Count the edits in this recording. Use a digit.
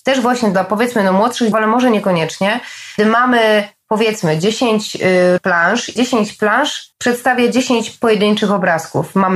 5